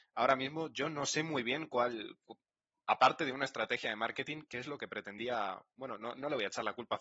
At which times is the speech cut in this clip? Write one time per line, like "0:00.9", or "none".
none